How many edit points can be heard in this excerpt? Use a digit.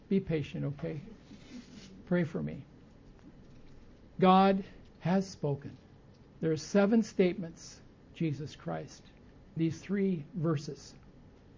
4